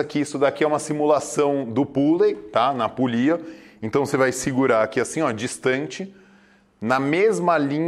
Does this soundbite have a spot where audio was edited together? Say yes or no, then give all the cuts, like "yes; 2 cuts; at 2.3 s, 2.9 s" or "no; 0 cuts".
no; 0 cuts